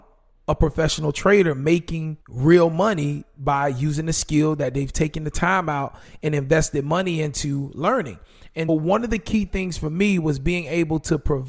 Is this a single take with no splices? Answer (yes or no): no